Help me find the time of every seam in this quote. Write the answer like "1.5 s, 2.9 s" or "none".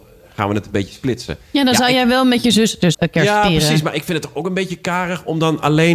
2.9 s